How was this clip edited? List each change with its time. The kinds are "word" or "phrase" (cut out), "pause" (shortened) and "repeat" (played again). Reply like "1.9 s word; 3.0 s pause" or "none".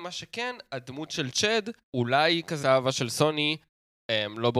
1.9 s word; 2.6 s word